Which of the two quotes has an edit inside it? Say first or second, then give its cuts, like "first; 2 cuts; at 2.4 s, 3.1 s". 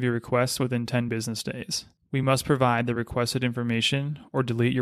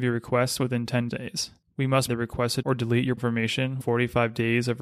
second; 5 cuts; at 1.1 s, 2.1 s, 2.6 s, 3.2 s, 3.8 s